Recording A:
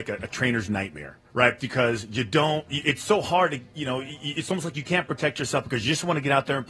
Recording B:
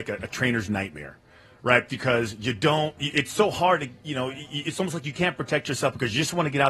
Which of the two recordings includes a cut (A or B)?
A